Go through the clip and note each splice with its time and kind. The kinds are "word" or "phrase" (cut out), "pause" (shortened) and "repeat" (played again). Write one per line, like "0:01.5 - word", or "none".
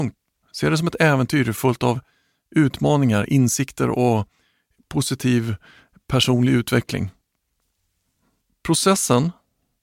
none

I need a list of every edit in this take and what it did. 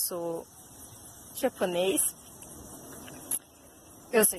0:01.3 - word

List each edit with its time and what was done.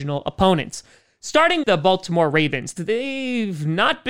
0:01.6 - word
0:02.8 - word

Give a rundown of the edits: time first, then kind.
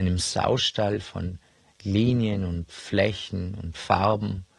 none

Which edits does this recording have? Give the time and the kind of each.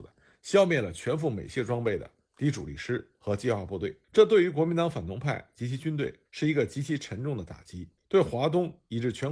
0:04.0 - pause
0:06.3 - pause
0:08.0 - pause

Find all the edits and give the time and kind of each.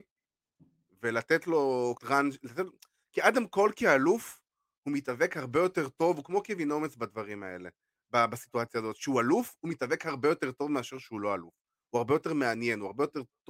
0:02.0 - word

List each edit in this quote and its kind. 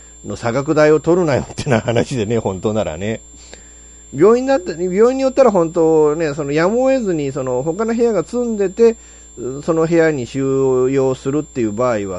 none

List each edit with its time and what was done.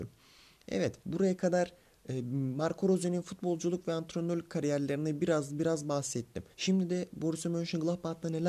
0:01.0 - pause
0:06.5 - pause

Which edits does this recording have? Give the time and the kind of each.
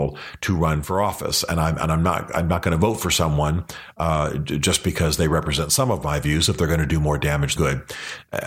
0:07.6 - word

